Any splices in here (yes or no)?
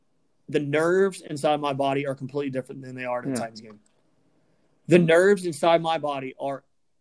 no